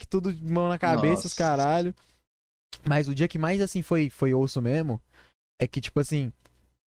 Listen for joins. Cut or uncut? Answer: uncut